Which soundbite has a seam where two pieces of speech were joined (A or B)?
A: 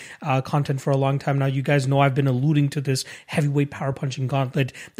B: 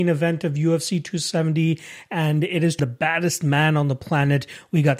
B